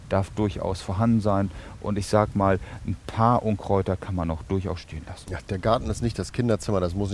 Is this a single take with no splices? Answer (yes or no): yes